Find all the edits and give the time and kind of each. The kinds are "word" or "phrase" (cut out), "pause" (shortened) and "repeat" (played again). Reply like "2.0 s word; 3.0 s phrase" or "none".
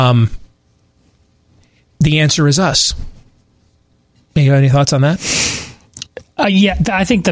none